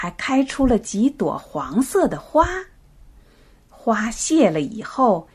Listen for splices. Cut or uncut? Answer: uncut